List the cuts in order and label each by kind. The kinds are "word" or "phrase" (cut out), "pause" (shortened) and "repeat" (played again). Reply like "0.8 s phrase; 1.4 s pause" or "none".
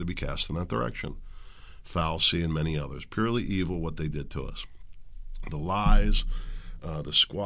none